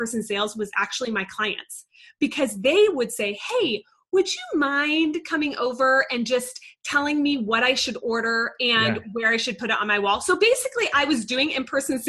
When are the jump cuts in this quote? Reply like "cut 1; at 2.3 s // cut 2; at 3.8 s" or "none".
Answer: none